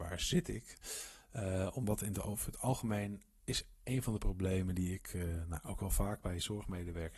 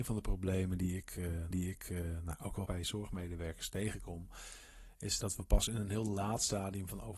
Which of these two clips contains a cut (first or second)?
second